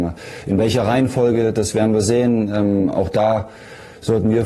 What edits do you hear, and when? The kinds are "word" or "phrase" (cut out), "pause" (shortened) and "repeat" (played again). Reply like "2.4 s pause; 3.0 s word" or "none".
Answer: none